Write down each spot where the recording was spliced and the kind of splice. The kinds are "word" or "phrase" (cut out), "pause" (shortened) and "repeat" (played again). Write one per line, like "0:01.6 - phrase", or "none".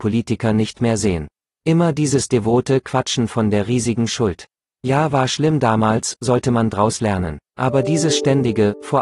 0:07.5 - pause